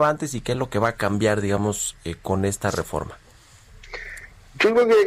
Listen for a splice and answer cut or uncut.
uncut